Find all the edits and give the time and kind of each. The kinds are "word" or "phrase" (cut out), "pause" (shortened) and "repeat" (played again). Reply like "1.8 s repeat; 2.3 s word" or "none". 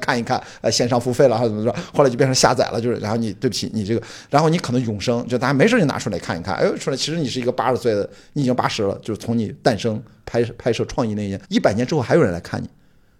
11.4 s pause